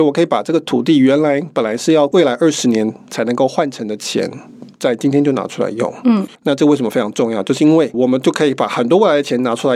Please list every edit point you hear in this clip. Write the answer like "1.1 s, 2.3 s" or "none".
6.3 s

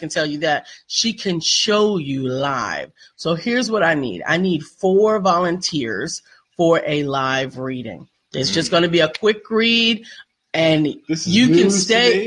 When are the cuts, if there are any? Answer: none

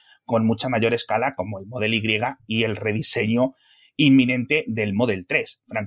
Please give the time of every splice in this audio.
none

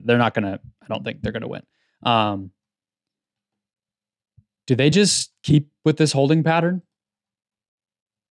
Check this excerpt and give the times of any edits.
none

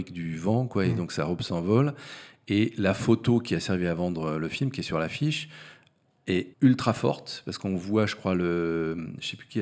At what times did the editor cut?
6.5 s

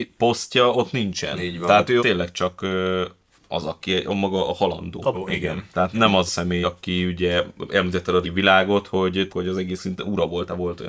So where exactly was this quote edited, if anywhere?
2.0 s, 5.1 s, 5.9 s, 6.3 s, 6.6 s, 8.2 s, 9.3 s, 9.8 s

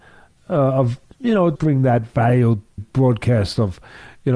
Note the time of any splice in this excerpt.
1.6 s, 2.8 s

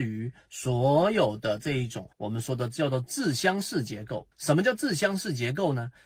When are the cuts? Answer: 2.1 s, 4.3 s

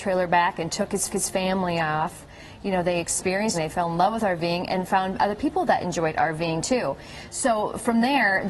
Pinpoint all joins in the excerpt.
1.1 s, 3.5 s

